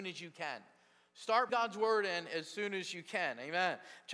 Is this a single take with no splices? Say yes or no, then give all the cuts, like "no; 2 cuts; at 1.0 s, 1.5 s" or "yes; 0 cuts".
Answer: no; 1 cut; at 1.5 s